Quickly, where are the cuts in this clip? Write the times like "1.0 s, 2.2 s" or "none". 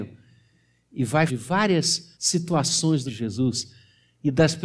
1.3 s, 2.1 s, 3.1 s